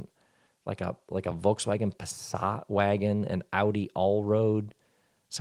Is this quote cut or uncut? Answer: uncut